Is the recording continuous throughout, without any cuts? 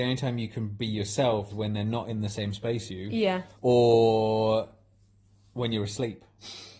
no; 3 cuts; at 1.5 s, 2.9 s, 3.5 s

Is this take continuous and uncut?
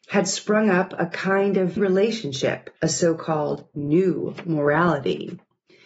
no; 2 cuts; at 1.8 s, 2.8 s

